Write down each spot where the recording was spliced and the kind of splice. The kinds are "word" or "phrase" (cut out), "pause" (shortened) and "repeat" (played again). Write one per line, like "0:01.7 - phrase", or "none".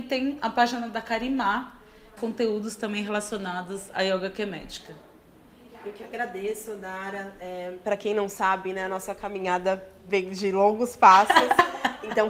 0:02.2 - phrase